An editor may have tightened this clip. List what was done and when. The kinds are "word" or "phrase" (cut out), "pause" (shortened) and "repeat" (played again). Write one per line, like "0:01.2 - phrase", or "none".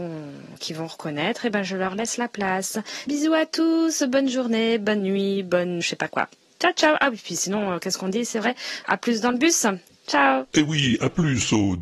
0:03.1 - word
0:05.8 - word
0:08.8 - word